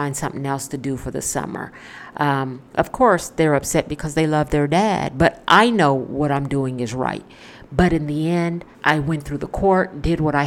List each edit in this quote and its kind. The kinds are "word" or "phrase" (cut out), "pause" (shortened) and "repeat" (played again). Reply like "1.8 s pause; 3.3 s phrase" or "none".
2.7 s pause; 8.7 s pause